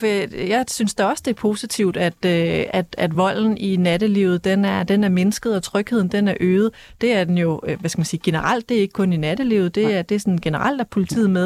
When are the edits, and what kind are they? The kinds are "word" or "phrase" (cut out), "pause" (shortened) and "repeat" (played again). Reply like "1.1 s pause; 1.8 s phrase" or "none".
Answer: none